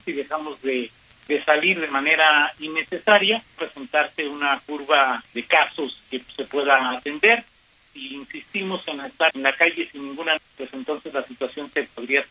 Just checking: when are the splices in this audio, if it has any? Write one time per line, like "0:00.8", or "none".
0:03.6
0:05.3
0:09.3
0:10.4